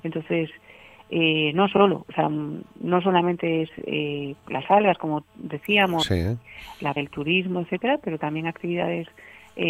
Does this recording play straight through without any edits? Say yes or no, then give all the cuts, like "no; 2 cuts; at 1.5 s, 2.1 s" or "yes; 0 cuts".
no; 2 cuts; at 4.3 s, 7.0 s